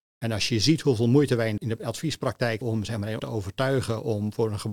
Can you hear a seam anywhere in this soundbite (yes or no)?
yes